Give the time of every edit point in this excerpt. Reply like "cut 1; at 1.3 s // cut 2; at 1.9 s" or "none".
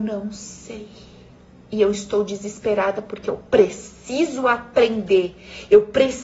none